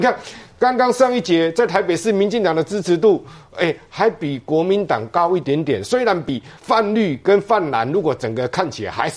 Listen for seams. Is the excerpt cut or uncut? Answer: cut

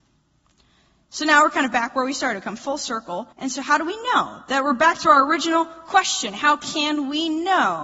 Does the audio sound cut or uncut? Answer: cut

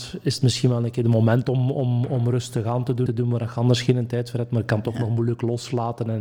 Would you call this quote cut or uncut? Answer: cut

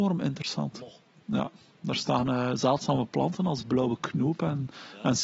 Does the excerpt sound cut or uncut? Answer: uncut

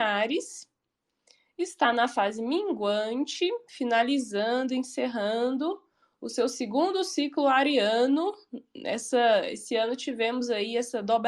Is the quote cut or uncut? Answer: uncut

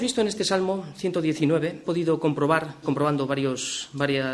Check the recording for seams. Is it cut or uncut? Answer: cut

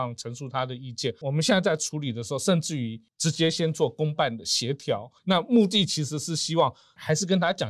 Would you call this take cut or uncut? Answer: cut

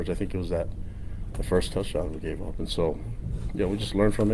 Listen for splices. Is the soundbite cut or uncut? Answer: uncut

